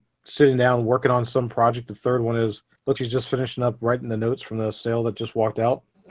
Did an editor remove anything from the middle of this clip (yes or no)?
yes